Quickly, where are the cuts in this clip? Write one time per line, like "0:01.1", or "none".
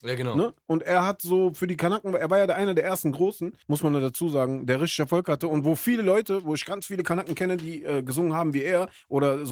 0:03.6

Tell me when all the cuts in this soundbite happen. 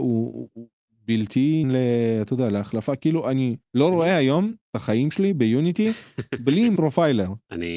0:01.6
0:03.6
0:04.6
0:06.8

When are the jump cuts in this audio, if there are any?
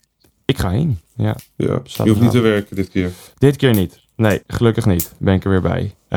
0:03.3
0:04.1

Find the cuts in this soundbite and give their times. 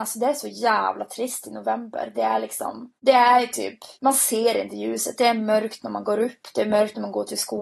0:03.0
0:03.9

